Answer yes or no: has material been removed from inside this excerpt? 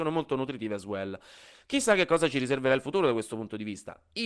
no